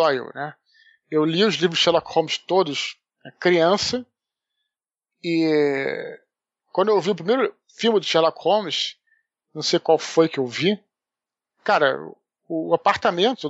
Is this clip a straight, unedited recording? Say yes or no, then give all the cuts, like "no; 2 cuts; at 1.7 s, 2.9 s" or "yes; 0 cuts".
yes; 0 cuts